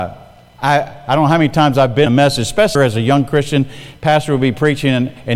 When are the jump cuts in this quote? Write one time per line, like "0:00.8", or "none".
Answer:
0:02.1
0:02.7